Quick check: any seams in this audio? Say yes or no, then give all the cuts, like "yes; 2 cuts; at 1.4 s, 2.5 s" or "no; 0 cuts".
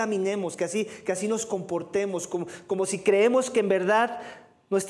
no; 0 cuts